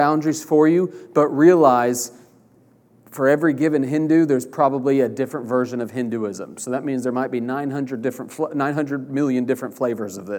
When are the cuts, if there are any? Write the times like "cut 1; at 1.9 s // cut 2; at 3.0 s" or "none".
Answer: none